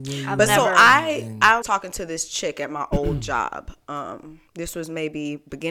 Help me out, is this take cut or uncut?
cut